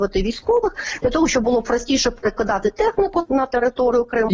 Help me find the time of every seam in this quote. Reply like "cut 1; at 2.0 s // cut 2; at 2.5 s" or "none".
cut 1; at 3.3 s